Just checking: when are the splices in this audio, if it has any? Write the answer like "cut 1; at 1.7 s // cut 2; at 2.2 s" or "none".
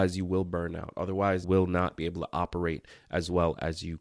cut 1; at 1.4 s